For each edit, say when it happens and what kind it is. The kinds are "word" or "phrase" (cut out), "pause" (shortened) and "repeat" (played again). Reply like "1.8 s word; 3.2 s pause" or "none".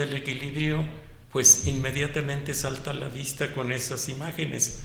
1.2 s pause